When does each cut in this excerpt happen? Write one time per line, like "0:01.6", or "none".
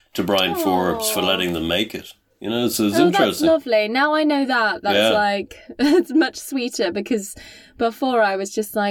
none

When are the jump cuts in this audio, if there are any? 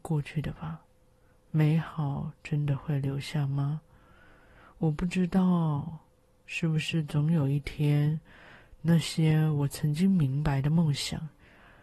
none

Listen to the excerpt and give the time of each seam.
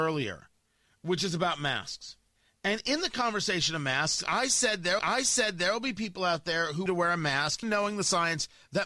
0:02.4
0:05.0
0:06.9
0:07.6

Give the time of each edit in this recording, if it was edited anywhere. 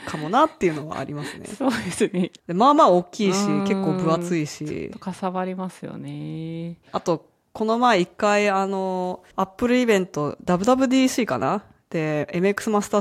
0:06.8
0:09.3

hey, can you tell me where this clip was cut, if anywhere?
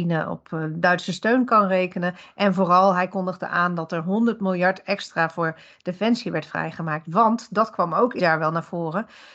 0:08.2

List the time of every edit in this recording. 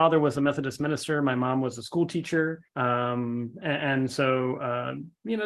0:02.7

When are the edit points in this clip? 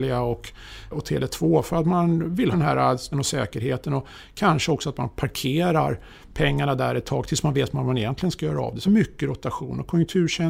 0:00.9
0:02.5
0:03.1
0:08.9

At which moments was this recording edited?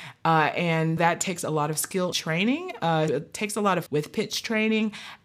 0:01.0
0:02.1
0:03.1
0:03.9

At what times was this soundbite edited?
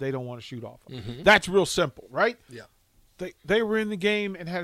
0:03.4

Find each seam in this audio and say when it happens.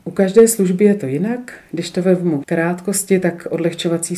0:02.4

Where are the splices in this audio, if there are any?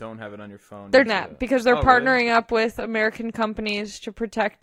0:01.1

